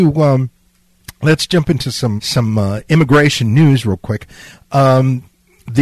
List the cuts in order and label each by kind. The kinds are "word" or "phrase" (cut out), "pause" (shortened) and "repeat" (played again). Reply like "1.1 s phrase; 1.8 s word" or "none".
2.2 s word